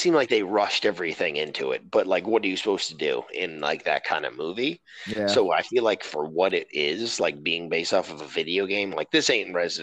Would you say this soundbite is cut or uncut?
uncut